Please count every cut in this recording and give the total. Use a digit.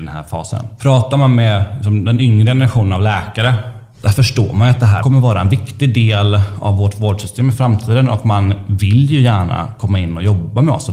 0